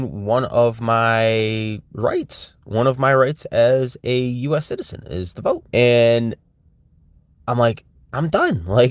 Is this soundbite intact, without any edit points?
no; 3 cuts; at 1.9 s, 5.3 s, 5.7 s

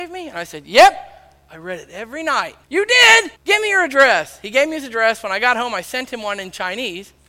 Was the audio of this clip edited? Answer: yes; 2 cuts; at 2.6 s, 3.4 s

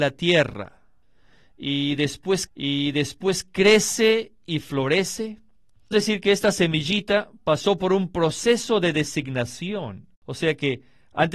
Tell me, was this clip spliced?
yes; 3 cuts; at 2.5 s, 5.9 s, 10.1 s

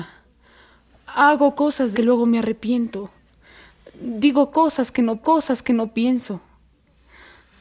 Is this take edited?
yes; 2 cuts; at 1.9 s, 5.2 s

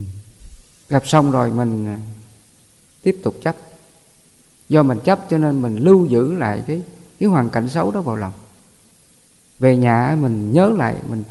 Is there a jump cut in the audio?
no; 0 cuts

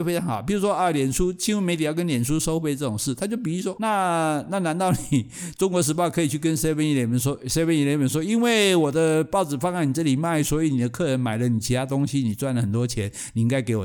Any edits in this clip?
yes; 1 cut; at 3.7 s

